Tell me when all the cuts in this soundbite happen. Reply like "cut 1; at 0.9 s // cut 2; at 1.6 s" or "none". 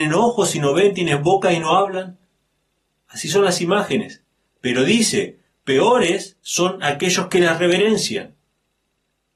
none